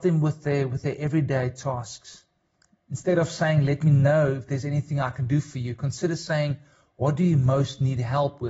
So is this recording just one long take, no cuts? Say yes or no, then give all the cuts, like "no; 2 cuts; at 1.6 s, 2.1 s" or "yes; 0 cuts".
yes; 0 cuts